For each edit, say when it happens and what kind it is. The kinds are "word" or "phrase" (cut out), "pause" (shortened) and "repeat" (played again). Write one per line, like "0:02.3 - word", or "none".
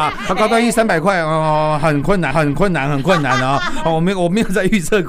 0:02.3 - repeat